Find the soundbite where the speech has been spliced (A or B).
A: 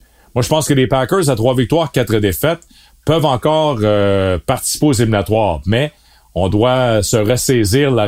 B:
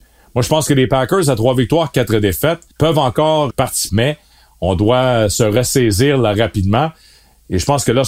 B